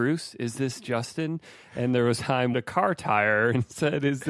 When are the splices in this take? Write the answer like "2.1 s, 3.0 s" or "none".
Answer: 2.2 s, 2.5 s